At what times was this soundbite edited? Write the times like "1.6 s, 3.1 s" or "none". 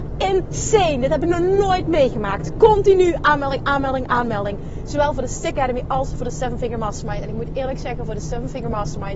3.2 s, 5.5 s